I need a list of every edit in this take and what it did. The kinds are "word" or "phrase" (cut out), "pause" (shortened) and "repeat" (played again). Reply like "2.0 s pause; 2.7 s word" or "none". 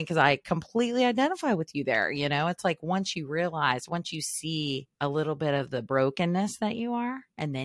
4.9 s pause